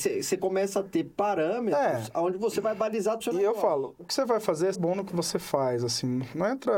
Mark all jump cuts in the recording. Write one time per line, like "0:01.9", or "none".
0:03.2
0:04.7